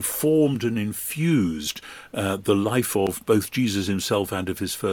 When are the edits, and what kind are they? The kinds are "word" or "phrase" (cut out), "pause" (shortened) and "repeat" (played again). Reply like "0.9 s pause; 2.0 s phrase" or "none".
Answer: none